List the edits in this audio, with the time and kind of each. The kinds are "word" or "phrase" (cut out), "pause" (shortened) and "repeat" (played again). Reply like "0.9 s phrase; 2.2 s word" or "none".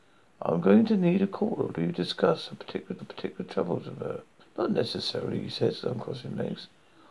1.8 s word; 3.0 s repeat; 4.4 s pause